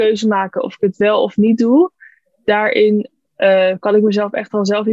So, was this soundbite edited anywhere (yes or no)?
no